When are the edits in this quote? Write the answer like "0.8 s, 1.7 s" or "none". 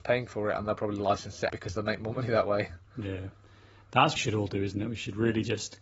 1.5 s, 4.2 s